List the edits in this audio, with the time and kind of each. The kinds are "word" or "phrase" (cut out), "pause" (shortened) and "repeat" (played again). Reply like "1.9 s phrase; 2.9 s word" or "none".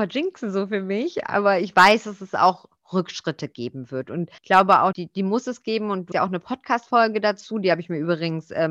4.4 s pause; 4.9 s word; 6.1 s word